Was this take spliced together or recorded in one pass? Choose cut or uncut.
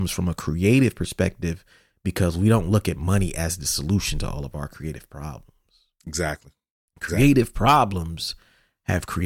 uncut